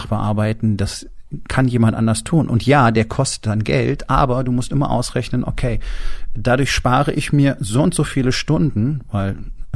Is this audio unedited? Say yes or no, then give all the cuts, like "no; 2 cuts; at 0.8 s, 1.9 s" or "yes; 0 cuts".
yes; 0 cuts